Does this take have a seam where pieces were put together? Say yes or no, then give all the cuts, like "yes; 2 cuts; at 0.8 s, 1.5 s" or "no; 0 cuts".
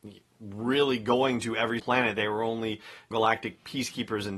yes; 2 cuts; at 1.8 s, 3.1 s